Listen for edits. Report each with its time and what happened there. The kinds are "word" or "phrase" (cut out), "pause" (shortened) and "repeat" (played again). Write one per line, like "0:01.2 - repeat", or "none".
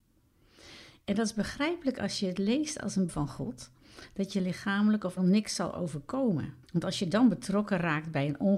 0:03.1 - word
0:05.2 - word
0:06.6 - pause